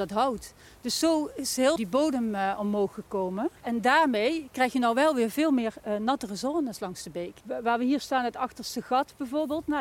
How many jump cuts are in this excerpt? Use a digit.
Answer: 3